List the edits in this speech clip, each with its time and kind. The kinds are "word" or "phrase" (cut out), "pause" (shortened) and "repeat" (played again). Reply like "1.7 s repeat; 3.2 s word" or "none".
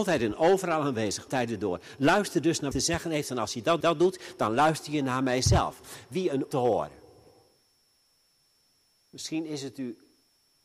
1.3 s word; 2.7 s phrase; 3.8 s repeat; 6.5 s phrase